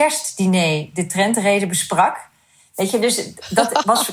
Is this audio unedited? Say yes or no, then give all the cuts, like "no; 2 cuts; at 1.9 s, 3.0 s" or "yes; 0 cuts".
yes; 0 cuts